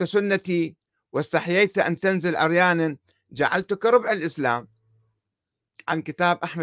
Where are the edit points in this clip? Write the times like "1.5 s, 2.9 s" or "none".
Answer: none